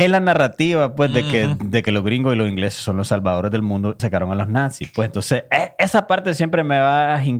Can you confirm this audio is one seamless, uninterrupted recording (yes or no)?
no